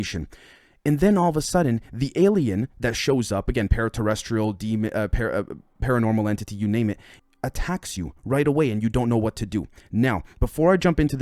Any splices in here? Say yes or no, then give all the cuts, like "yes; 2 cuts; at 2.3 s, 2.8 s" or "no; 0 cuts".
no; 0 cuts